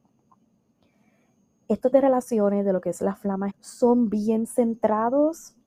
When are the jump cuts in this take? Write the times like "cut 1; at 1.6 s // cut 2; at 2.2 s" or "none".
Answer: cut 1; at 1.9 s // cut 2; at 3.5 s